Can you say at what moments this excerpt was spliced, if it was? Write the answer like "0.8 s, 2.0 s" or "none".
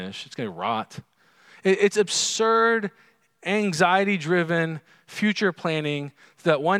none

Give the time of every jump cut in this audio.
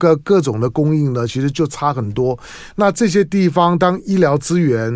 none

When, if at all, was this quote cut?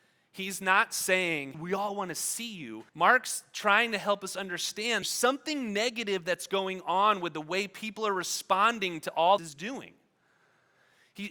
1.5 s, 2.9 s, 5.0 s, 9.4 s

